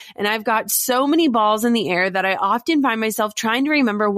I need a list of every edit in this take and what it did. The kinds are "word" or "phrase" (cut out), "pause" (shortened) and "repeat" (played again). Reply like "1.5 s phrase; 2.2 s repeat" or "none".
none

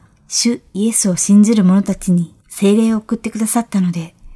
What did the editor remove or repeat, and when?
2.4 s pause

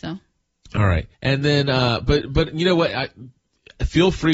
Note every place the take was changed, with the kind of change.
1.1 s pause

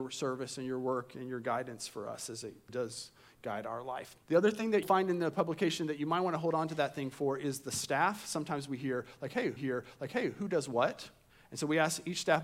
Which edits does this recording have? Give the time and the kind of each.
2.7 s word; 4.2 s pause; 4.8 s phrase; 9.6 s repeat; 11.3 s pause

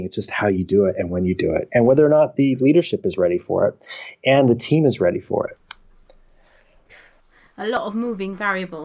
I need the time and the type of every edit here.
none

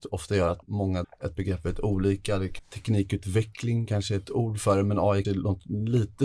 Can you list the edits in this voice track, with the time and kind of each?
1.0 s word; 2.6 s word; 4.2 s word; 5.2 s word

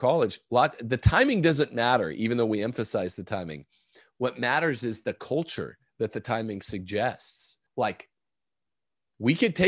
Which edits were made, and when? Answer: 7.7 s pause

